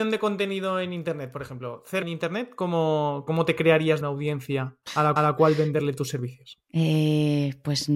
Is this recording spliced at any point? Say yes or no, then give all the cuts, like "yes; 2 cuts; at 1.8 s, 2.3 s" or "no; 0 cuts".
yes; 5 cuts; at 2.0 s, 3.3 s, 4.0 s, 4.8 s, 5.2 s